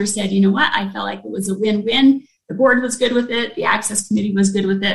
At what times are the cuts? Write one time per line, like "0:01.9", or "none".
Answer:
none